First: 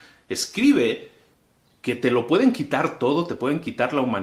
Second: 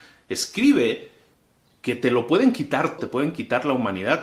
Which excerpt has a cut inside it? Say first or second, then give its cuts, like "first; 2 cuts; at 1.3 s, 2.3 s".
second; 1 cut; at 3.0 s